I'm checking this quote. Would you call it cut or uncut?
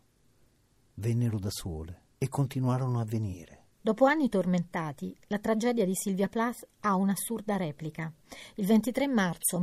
cut